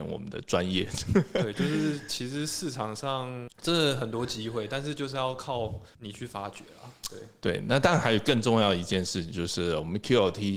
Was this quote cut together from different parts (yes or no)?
no